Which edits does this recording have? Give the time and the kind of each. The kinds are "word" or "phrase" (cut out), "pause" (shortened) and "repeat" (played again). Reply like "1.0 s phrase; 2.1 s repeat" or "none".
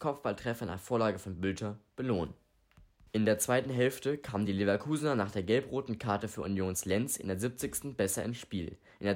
none

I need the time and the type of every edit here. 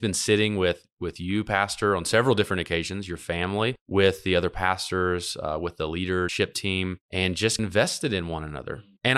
none

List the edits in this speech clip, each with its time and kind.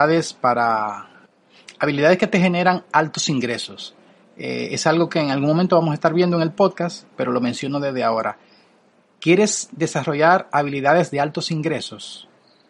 none

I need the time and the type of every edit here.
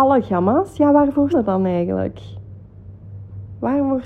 1.3 s word

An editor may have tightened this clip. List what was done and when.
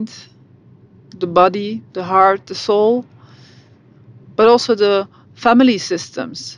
none

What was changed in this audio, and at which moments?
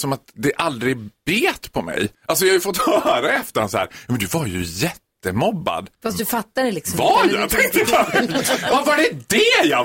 2.1 s pause; 5.9 s pause

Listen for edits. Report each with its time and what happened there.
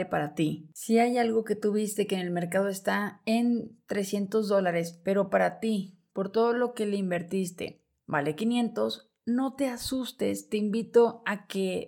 none

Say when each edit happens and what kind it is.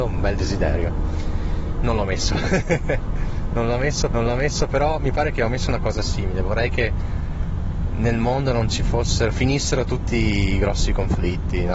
4.1 s repeat

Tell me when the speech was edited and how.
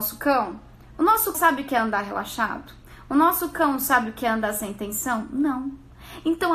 1.3 s word

